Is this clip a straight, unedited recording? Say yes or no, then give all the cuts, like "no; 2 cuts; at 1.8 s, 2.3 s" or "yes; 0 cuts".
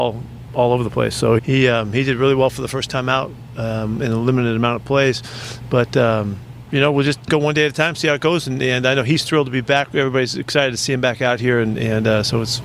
no; 1 cut; at 1.4 s